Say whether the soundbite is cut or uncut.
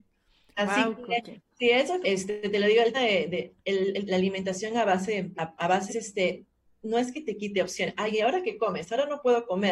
cut